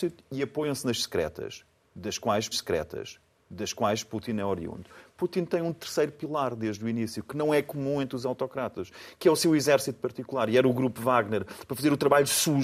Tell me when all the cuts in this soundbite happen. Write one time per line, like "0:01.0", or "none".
0:02.5